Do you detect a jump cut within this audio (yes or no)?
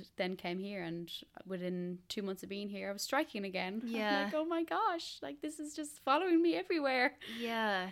no